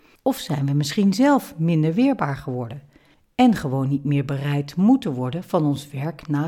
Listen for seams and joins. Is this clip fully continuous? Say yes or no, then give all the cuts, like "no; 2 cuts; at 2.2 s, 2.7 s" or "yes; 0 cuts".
yes; 0 cuts